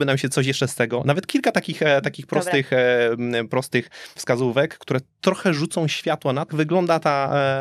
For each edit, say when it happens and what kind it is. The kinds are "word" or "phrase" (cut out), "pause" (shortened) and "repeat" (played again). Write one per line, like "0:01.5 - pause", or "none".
0:04.2 - word
0:06.5 - word